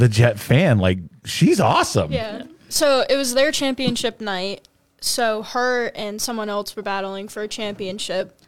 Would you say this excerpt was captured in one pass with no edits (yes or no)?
yes